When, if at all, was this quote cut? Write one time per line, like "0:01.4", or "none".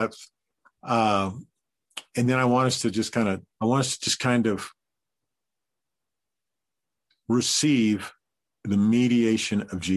0:02.1
0:03.5